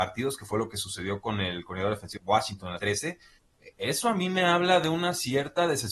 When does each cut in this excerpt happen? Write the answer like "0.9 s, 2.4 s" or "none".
2.2 s, 2.8 s

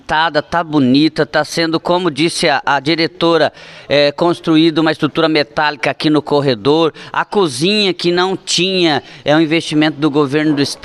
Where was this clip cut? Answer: none

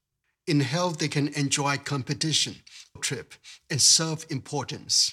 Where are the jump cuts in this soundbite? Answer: 3.0 s

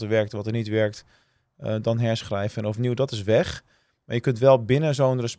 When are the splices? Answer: none

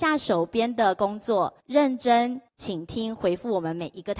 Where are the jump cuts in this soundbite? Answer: 1.6 s, 2.5 s

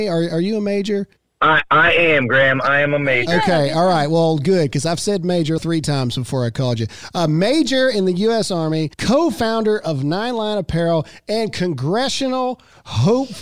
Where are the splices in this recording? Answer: 1.2 s, 5.6 s, 8.9 s

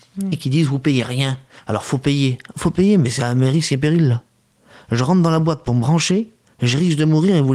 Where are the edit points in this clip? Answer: none

